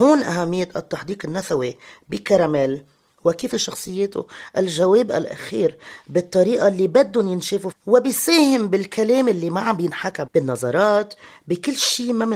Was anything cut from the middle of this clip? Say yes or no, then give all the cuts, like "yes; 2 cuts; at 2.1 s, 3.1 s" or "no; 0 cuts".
yes; 3 cuts; at 3.5 s, 7.7 s, 10.3 s